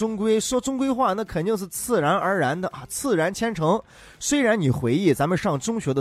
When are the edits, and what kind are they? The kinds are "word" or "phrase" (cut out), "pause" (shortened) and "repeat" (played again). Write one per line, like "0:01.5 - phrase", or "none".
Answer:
none